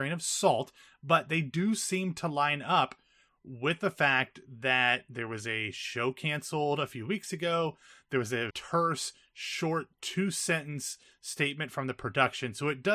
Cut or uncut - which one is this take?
cut